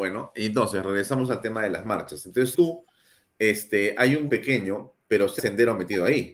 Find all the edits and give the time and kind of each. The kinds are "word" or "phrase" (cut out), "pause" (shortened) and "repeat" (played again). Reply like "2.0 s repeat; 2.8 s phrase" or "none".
2.5 s word; 4.3 s word; 5.4 s phrase